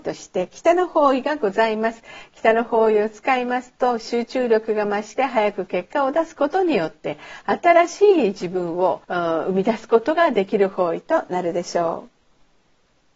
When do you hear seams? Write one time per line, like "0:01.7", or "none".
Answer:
0:09.0